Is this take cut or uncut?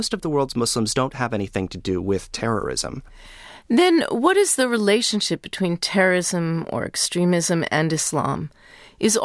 uncut